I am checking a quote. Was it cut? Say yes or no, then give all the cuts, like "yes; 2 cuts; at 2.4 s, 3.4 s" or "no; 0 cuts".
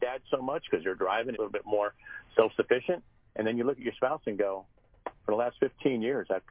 yes; 1 cut; at 1.3 s